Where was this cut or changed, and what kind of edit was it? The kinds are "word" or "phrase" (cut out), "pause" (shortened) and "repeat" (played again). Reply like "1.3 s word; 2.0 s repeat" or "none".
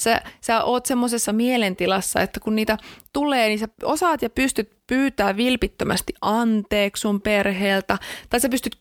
1.3 s word